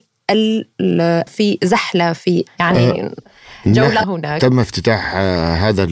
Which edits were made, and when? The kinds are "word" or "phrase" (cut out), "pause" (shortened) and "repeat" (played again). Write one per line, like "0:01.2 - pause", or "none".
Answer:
0:01.3 - word
0:02.5 - word
0:04.0 - word